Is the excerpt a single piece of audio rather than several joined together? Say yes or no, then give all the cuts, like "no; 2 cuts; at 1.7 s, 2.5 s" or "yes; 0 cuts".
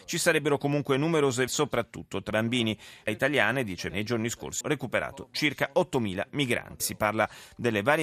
no; 6 cuts; at 1.5 s, 2.3 s, 3.1 s, 3.9 s, 4.6 s, 6.8 s